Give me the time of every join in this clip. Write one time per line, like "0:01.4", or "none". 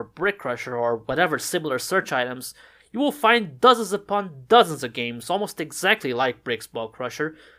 none

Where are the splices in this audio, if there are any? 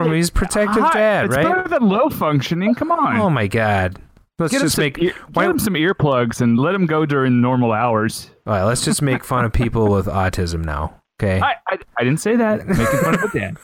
none

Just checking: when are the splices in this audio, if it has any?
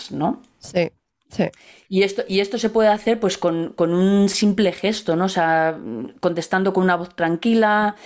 none

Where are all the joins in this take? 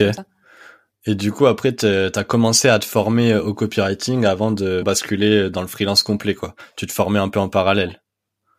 0:04.8

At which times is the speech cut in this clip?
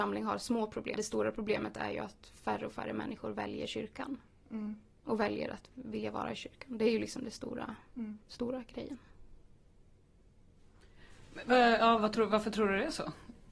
0:01.0
0:08.2
0:12.0

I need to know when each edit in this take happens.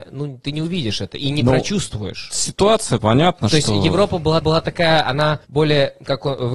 0:03.0
0:04.4
0:05.4

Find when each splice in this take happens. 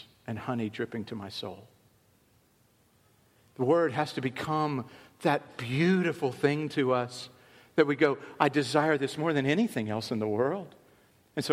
none

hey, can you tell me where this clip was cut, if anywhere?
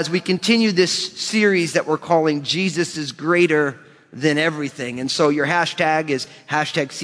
none

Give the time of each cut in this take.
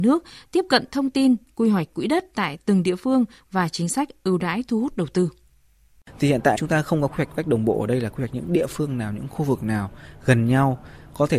0:06.6

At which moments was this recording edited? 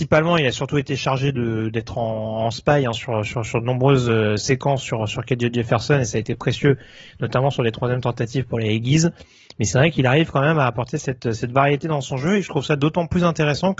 none

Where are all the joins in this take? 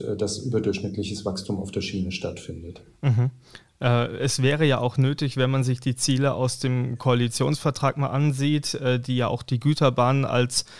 none

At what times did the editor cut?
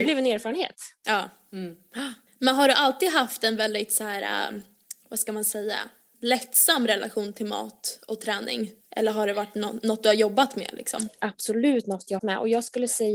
0:02.3
0:08.8
0:12.2

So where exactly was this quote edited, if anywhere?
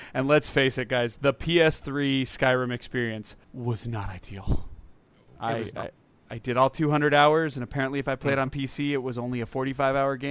0:03.4

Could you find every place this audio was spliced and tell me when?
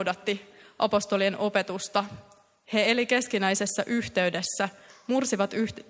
none

